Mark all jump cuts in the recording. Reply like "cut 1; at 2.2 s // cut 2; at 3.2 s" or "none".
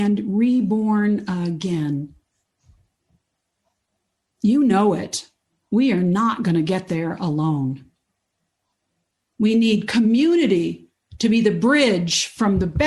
none